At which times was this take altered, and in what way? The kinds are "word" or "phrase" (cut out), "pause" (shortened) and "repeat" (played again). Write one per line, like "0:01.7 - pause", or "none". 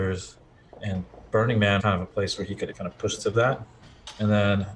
0:01.8 - word
0:02.7 - word
0:03.2 - word

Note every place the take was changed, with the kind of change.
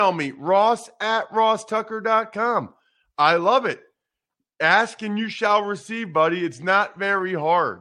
none

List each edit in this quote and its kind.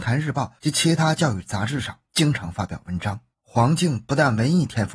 0:02.0 - pause
0:03.3 - pause

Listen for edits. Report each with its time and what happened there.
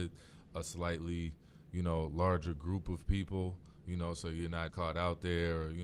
0:04.7 - word

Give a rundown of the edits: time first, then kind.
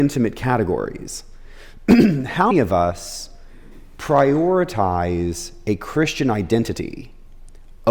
0:02.5 - word

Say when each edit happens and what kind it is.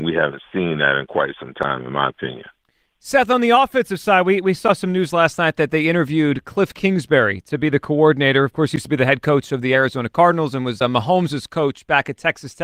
none

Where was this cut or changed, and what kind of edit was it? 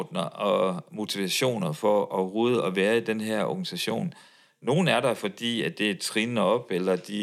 none

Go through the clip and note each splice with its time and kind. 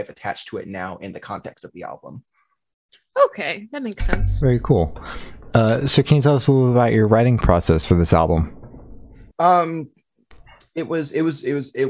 0:09.3 - pause

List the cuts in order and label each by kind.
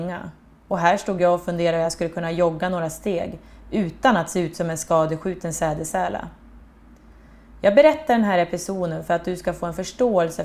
none

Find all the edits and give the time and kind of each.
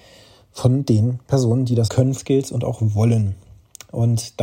0:01.9 - word
0:02.2 - word

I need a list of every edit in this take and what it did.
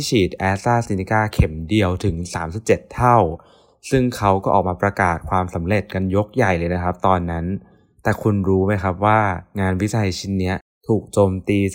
none

